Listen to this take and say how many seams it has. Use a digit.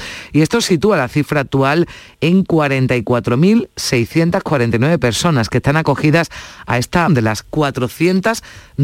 1